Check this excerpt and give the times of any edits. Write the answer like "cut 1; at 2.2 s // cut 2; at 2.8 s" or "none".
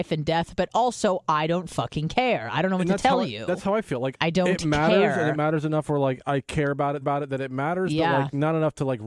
cut 1; at 4.1 s // cut 2; at 7.0 s